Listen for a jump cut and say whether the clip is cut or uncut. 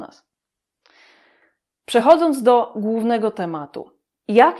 uncut